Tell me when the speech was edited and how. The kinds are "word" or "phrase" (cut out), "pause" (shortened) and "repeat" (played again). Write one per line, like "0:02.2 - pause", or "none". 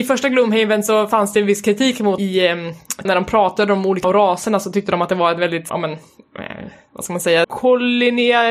0:02.2 - phrase
0:03.0 - word
0:04.0 - word
0:05.7 - word
0:07.4 - word